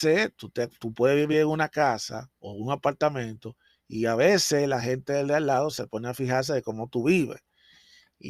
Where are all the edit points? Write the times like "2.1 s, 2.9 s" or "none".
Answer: none